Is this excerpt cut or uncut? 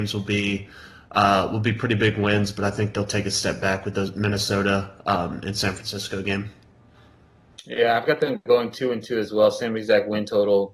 uncut